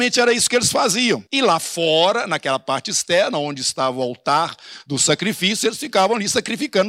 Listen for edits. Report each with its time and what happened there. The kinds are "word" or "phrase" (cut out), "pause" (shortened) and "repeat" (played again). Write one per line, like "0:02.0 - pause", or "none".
0:01.3 - pause